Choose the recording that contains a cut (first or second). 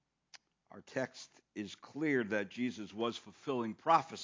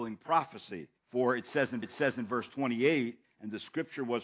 second